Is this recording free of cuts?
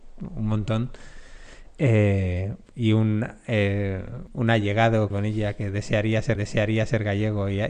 no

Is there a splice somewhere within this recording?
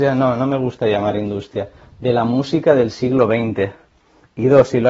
no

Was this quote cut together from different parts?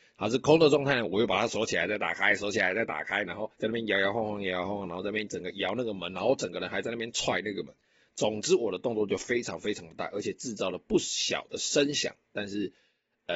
yes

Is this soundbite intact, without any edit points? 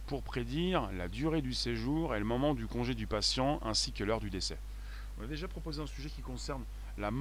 yes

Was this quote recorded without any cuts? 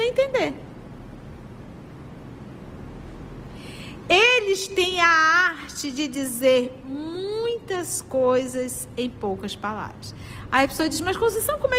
yes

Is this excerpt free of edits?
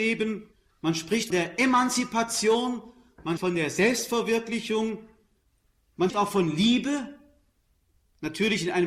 no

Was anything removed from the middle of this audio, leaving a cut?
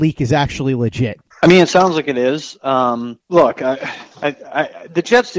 yes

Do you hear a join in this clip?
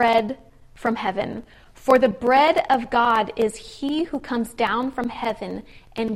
no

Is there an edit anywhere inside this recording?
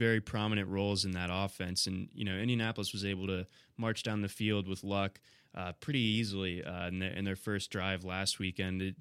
no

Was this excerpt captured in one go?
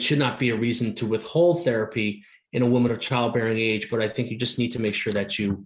yes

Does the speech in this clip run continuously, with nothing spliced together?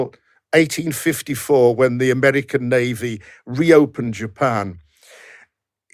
yes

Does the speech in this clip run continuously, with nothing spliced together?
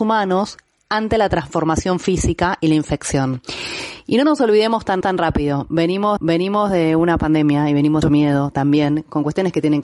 no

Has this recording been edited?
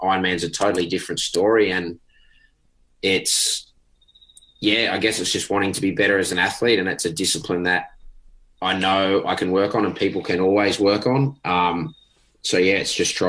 no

